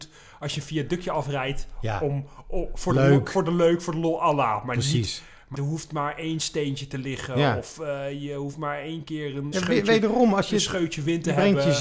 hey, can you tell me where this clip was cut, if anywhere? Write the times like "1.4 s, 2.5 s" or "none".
5.5 s, 9.5 s